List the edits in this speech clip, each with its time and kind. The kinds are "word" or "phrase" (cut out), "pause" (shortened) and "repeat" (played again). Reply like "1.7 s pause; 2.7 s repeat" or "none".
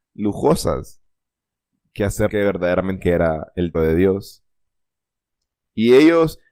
2.3 s word; 3.0 s word; 3.7 s word